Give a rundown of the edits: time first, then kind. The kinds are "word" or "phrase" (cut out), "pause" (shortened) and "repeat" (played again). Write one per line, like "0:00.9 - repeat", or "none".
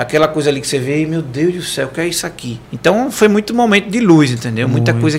0:02.6 - pause

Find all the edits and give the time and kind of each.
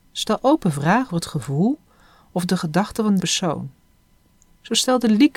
0:01.1 - word
0:03.2 - word

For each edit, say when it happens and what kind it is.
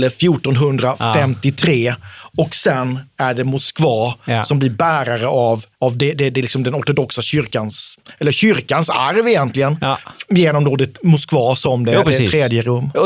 0:05.7 - pause

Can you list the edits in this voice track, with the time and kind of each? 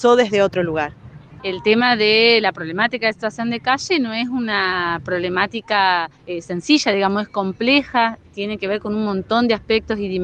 0:06.1 - pause

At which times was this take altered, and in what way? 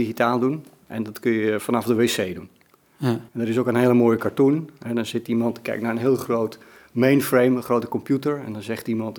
0:03.3 - pause

